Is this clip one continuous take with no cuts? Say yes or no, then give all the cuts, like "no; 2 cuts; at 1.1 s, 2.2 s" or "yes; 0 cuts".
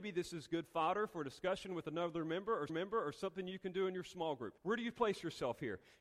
no; 2 cuts; at 2.7 s, 4.6 s